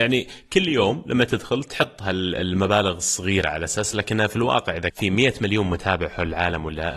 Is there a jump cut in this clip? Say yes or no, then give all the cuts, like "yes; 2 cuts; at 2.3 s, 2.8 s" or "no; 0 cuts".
yes; 1 cut; at 4.9 s